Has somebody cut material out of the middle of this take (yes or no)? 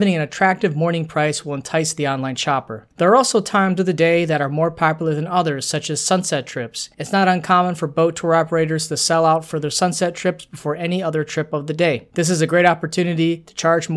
no